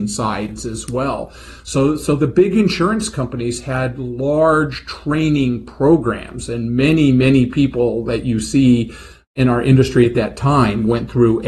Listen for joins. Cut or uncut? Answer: uncut